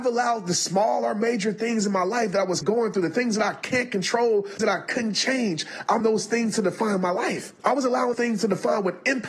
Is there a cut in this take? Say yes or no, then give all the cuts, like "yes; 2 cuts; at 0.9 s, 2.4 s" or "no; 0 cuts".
yes; 5 cuts; at 2.6 s, 4.6 s, 6.0 s, 7.6 s, 8.1 s